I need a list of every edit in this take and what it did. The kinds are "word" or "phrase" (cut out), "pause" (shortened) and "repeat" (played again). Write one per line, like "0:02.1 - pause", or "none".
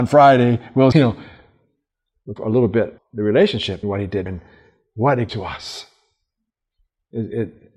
0:00.9 - word
0:02.4 - word
0:03.0 - word
0:03.8 - word
0:04.3 - word
0:05.3 - word